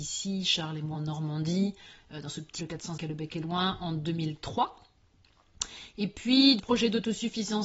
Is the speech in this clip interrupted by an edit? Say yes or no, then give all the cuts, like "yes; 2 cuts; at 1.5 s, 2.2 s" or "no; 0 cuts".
yes; 4 cuts; at 0.9 s, 2.6 s, 3.0 s, 6.6 s